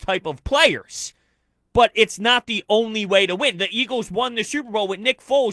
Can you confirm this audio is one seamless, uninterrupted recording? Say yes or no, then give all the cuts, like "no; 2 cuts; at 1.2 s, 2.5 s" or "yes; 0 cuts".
yes; 0 cuts